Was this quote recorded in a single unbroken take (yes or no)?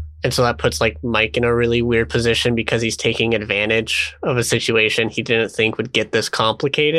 yes